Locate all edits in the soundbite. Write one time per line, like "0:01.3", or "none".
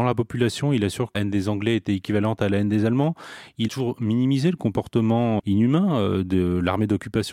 0:01.1
0:03.7
0:05.4